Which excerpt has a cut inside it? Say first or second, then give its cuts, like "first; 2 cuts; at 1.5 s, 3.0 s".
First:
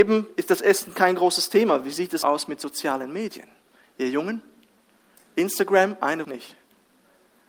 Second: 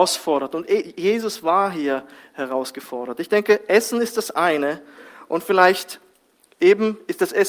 first; 2 cuts; at 2.2 s, 6.2 s